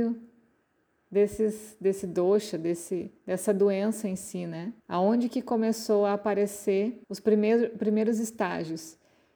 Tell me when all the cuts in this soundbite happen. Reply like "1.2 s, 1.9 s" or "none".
3.2 s, 4.8 s, 7.0 s